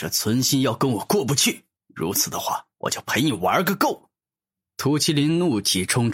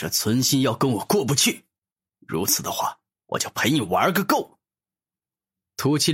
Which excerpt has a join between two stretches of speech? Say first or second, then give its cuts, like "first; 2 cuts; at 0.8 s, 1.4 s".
first; 3 cuts; at 1.7 s, 2.7 s, 4.2 s